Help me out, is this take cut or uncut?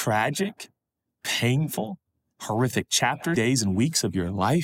cut